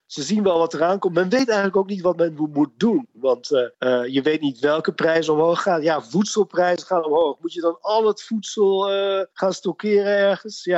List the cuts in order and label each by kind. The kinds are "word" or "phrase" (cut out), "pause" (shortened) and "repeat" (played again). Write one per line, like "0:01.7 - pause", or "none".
0:03.7 - pause
0:09.3 - pause